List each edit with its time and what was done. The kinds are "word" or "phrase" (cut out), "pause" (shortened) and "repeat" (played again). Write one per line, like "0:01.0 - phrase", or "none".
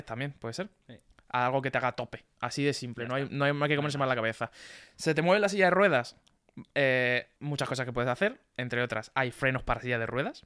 0:07.4 - word